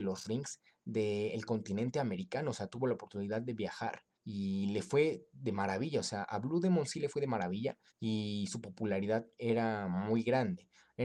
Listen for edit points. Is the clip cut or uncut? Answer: cut